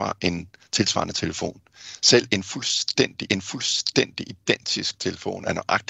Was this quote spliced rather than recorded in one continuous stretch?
yes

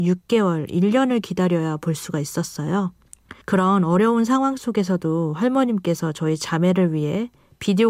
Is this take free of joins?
no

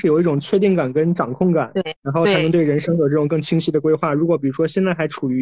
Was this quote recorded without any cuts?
no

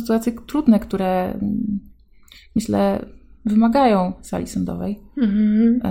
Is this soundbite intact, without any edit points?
yes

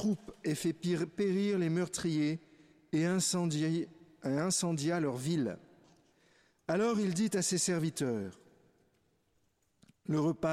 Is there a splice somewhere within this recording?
no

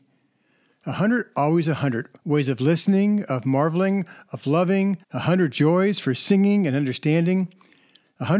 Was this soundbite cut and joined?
yes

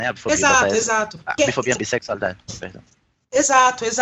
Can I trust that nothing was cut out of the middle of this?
no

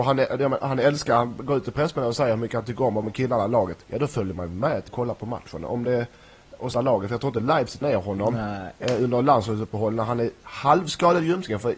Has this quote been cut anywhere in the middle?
yes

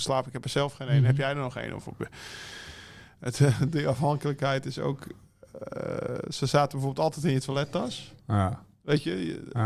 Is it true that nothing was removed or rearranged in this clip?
yes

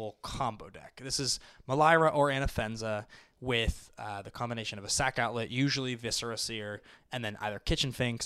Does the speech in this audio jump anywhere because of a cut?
no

